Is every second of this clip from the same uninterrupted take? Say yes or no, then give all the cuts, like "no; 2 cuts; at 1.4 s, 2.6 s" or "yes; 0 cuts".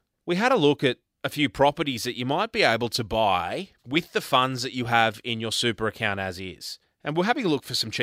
no; 2 cuts; at 3.8 s, 6.8 s